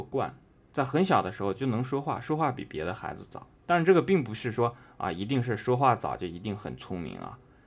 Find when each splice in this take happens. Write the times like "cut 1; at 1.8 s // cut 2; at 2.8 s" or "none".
cut 1; at 3.5 s